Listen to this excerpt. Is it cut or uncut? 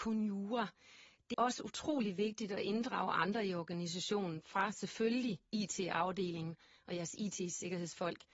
cut